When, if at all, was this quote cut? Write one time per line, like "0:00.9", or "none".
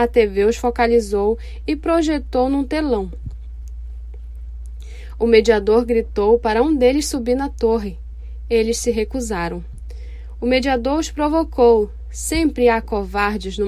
none